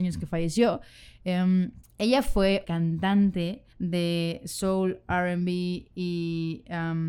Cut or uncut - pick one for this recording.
cut